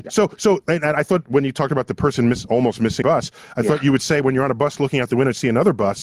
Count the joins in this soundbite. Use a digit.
1